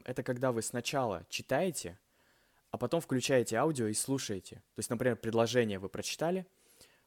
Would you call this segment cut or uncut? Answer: uncut